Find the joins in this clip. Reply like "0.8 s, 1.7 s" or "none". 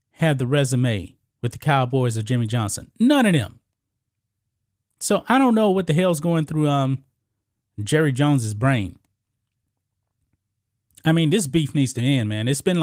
none